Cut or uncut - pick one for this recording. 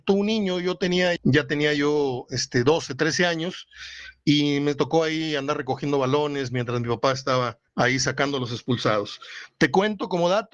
cut